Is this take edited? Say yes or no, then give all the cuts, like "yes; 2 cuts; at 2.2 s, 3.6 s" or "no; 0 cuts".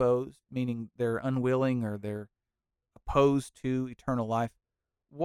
no; 0 cuts